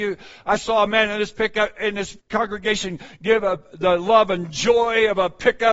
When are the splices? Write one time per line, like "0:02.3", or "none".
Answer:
0:02.2